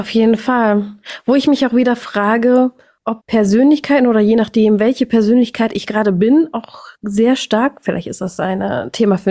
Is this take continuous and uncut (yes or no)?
no